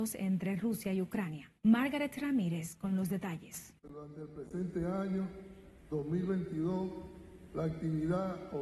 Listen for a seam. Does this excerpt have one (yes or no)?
yes